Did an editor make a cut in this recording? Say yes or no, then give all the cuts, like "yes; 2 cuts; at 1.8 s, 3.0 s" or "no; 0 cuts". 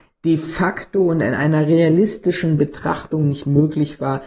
no; 0 cuts